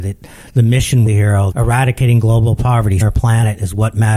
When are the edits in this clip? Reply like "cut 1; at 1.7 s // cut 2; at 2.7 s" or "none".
cut 1; at 1.1 s // cut 2; at 1.5 s // cut 3; at 3.0 s